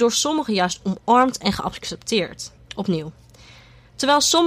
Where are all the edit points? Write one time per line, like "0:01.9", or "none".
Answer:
0:02.6